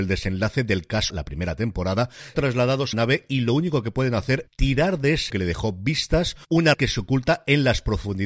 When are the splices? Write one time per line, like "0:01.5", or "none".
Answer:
0:01.1
0:02.3
0:02.9
0:04.5
0:05.3
0:06.7

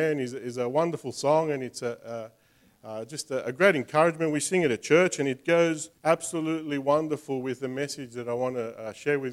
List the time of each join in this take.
0:06.0

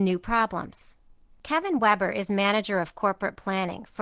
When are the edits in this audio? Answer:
none

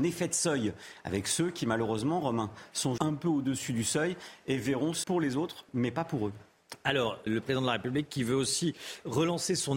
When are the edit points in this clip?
0:03.0
0:05.0
0:07.3

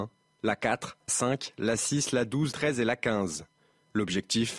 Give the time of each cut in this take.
0:01.1
0:02.5

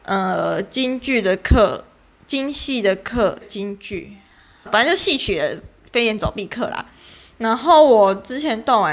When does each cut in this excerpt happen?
0:03.4
0:04.7

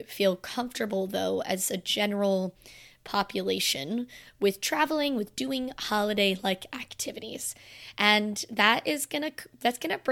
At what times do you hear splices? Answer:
none

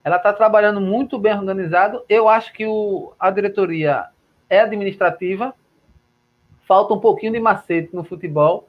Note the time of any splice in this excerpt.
none

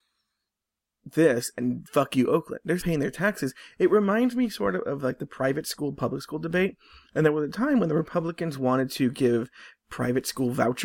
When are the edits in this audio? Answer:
0:02.8

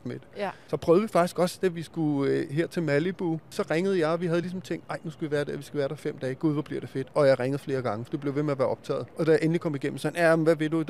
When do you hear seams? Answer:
none

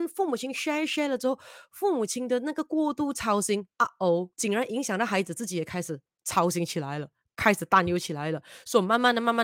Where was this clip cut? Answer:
0:03.7
0:04.3

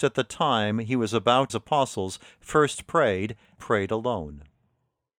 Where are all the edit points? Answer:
0:01.5
0:03.6

